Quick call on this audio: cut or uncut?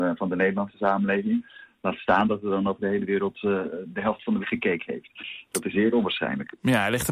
cut